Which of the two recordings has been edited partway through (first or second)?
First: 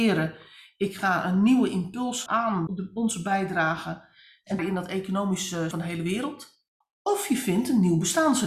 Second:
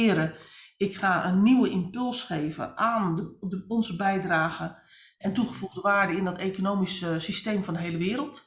first